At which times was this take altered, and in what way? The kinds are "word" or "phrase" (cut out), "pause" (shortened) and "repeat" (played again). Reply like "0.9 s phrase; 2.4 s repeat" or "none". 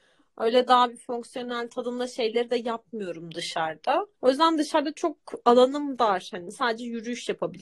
4.2 s pause